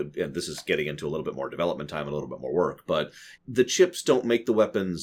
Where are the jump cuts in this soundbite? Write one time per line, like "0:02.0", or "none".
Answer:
0:03.4